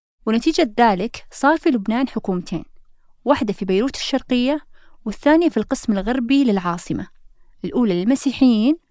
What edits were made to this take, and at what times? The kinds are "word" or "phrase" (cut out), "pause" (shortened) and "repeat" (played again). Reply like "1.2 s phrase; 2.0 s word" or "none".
none